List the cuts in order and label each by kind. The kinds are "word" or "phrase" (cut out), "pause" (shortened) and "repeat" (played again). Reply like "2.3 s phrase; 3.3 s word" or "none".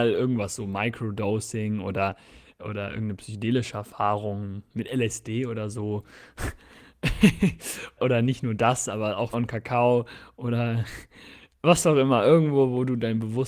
2.6 s word; 8.0 s word; 9.3 s phrase